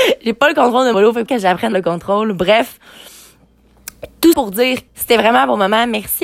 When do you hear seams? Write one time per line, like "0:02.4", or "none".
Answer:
0:00.9
0:01.3
0:01.7
0:04.3
0:04.9